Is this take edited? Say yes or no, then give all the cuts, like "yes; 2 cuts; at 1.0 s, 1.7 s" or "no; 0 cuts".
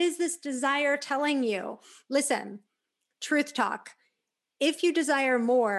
no; 0 cuts